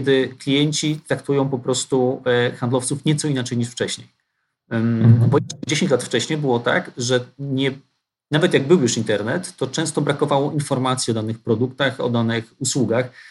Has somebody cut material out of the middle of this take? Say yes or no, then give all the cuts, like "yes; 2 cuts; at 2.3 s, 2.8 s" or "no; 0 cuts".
no; 0 cuts